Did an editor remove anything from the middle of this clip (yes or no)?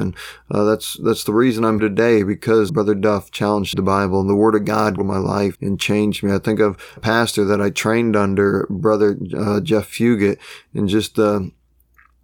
yes